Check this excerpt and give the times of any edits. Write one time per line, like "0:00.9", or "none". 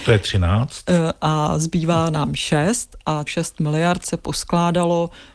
0:03.3